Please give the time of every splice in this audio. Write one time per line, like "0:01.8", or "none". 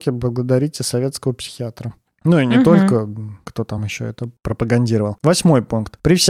none